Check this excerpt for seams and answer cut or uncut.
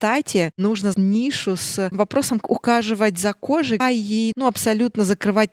cut